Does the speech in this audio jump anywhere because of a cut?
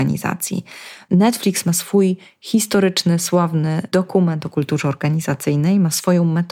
no; 0 cuts

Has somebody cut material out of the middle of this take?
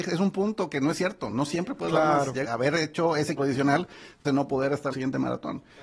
yes; 4 cuts; at 2.4 s, 3.4 s, 4.2 s, 4.9 s

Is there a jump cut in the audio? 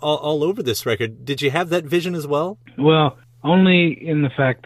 no; 0 cuts

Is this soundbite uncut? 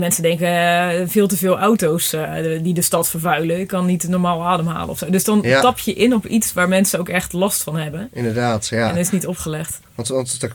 yes; 0 cuts

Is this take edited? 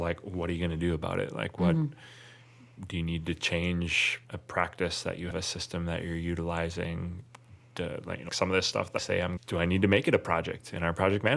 yes; 5 cuts; at 4.2 s, 5.3 s, 8.3 s, 9.0 s, 9.4 s

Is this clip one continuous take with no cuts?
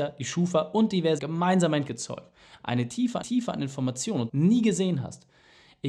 no; 4 cuts; at 1.2 s, 1.9 s, 3.2 s, 4.3 s

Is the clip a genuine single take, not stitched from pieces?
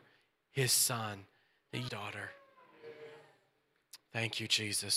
no; 1 cut; at 1.9 s

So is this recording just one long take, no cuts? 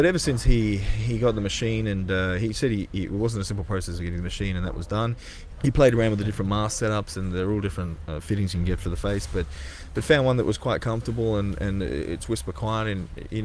yes; 0 cuts

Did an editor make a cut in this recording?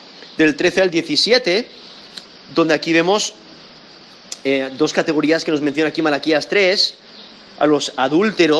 no; 0 cuts

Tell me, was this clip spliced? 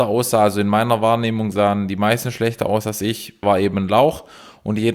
yes; 1 cut; at 3.4 s

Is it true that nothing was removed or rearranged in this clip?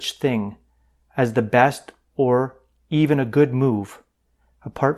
yes; 0 cuts

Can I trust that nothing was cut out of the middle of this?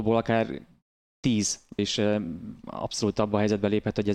no; 1 cut; at 1.8 s

